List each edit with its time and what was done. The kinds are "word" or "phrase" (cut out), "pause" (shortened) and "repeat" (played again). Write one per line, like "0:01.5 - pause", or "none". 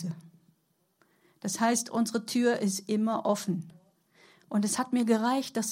none